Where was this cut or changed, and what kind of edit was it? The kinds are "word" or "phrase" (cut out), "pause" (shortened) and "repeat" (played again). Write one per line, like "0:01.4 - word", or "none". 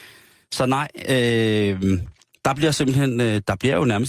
none